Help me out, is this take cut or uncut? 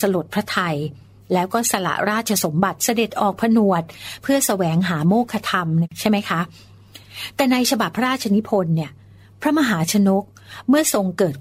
uncut